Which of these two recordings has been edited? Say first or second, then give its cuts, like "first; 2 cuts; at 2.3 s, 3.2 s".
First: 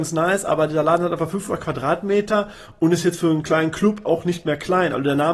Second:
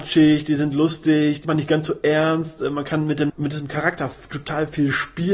second; 2 cuts; at 1.4 s, 3.3 s